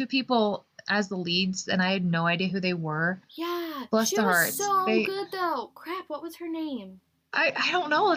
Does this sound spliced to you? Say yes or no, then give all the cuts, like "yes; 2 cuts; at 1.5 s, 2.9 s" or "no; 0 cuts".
yes; 1 cut; at 3.2 s